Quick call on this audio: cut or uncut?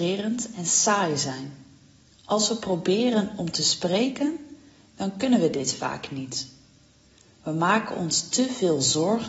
cut